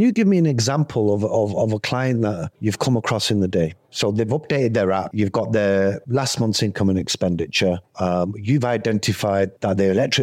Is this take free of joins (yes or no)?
yes